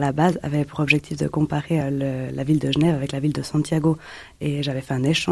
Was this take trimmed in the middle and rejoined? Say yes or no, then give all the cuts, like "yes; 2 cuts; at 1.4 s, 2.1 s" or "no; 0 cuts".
no; 0 cuts